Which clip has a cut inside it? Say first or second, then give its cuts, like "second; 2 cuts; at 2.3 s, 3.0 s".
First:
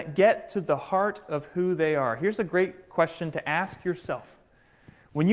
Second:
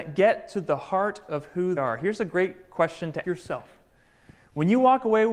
second; 2 cuts; at 1.8 s, 3.2 s